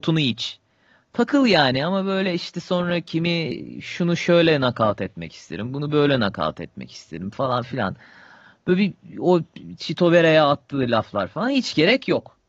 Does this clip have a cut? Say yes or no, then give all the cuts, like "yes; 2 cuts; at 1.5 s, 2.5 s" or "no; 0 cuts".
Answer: no; 0 cuts